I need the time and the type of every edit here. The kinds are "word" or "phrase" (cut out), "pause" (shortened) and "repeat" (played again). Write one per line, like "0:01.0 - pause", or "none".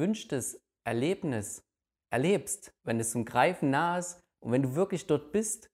0:02.8 - pause
0:04.3 - pause